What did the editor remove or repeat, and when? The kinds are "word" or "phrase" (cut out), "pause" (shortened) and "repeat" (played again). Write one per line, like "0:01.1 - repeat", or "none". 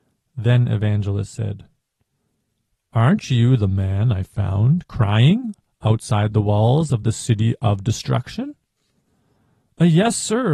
none

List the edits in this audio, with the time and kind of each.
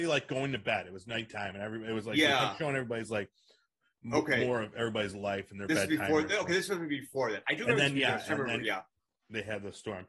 none

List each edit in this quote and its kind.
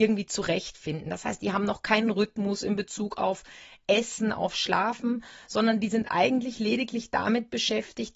none

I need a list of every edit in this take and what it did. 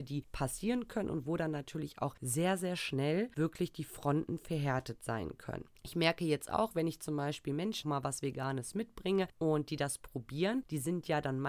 0:05.8 - pause
0:07.8 - phrase

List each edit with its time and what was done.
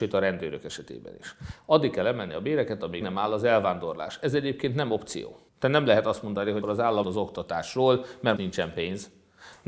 0:03.0 - word
0:05.5 - pause
0:06.6 - word
0:07.0 - word
0:08.4 - word

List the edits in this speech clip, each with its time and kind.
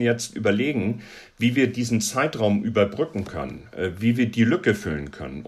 none

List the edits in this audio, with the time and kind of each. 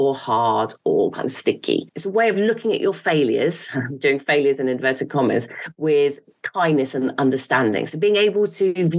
none

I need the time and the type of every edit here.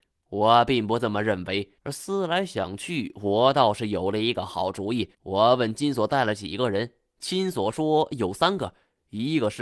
0:01.8 - pause
0:05.1 - pause

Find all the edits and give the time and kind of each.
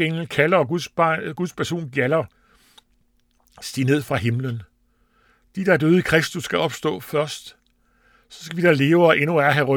none

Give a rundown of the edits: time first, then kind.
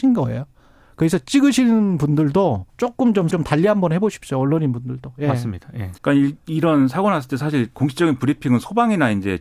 0:02.7 - pause
0:03.3 - word
0:06.0 - pause

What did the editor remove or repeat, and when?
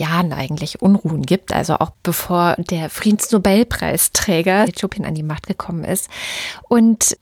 0:04.7 - phrase

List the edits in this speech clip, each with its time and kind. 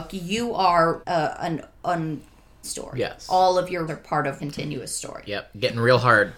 0:01.0 - word
0:02.6 - word
0:03.9 - word
0:04.4 - word

